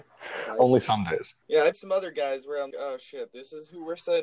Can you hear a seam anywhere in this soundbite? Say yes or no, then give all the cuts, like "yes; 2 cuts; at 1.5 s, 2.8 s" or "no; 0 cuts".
yes; 3 cuts; at 1.4 s, 1.7 s, 2.7 s